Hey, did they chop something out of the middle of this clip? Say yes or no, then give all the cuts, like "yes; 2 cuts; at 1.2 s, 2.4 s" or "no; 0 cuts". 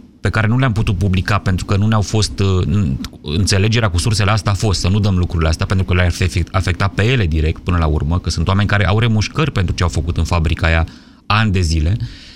no; 0 cuts